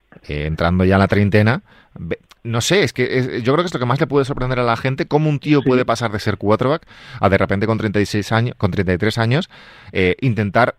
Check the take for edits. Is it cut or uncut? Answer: uncut